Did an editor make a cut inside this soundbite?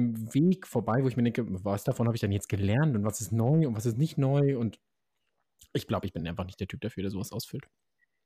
no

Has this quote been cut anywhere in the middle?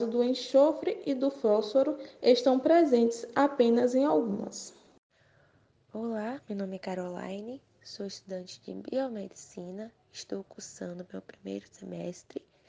no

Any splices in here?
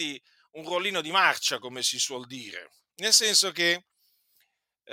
no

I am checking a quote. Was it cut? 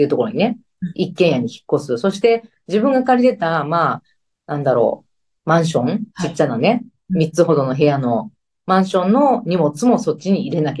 yes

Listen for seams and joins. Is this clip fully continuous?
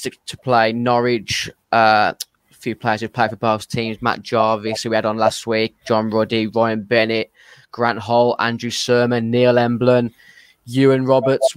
yes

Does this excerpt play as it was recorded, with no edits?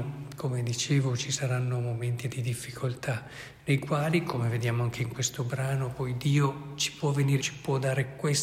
no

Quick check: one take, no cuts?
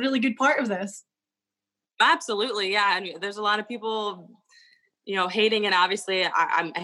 yes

